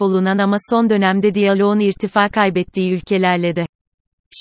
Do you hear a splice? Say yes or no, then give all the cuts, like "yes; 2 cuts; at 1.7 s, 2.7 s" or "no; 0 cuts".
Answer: no; 0 cuts